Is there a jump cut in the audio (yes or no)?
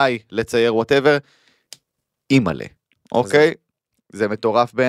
no